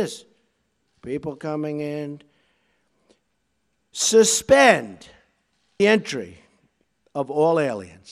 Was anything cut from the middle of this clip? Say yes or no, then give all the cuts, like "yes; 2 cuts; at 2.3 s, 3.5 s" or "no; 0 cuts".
yes; 1 cut; at 5.8 s